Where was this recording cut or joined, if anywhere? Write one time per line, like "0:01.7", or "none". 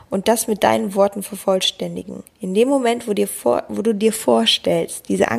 0:02.3